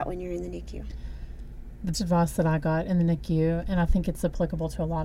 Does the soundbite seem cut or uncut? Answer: cut